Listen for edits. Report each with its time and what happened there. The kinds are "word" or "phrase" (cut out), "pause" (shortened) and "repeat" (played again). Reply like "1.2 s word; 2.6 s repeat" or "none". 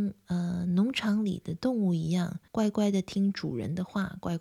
2.5 s pause